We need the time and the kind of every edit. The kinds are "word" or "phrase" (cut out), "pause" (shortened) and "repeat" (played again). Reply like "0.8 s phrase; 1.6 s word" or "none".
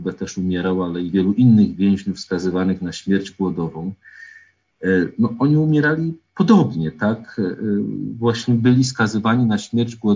none

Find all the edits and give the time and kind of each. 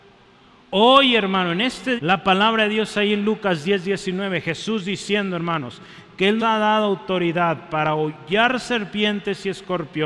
2.0 s word; 6.4 s word

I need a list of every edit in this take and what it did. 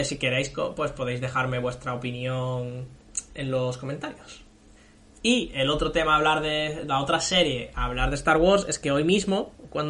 4.8 s pause

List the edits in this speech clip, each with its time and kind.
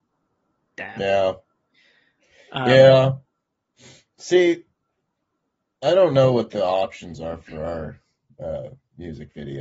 none

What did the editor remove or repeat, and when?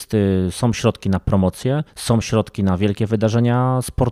1.9 s pause

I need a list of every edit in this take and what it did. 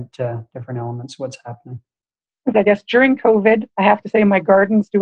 2.5 s phrase; 3.7 s pause

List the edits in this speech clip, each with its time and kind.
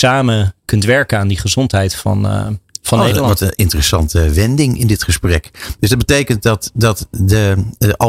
none

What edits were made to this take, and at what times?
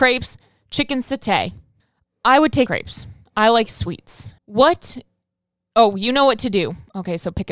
1.8 s pause; 2.7 s word; 4.4 s pause

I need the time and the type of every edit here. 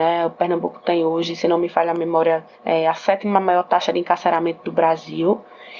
2.5 s pause

